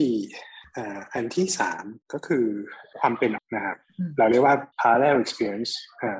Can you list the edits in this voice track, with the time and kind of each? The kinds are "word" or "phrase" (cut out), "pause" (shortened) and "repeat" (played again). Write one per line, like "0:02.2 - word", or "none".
0:02.0 - pause
0:03.4 - word
0:04.7 - pause